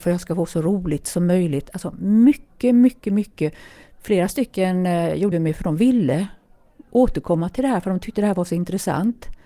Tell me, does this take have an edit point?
yes; 1 cut; at 5.3 s

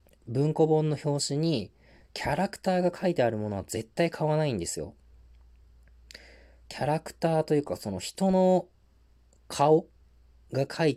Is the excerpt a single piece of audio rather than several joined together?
yes; 0 cuts

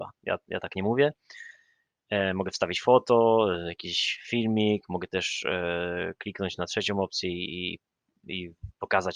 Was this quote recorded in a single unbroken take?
yes; 0 cuts

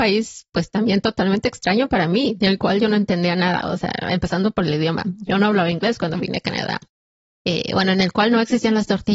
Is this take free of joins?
yes; 0 cuts

